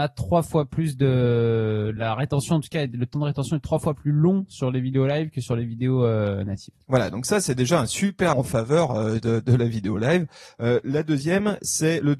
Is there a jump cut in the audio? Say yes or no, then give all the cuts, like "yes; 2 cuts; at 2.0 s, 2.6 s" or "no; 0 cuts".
yes; 2 cuts; at 2.0 s, 8.3 s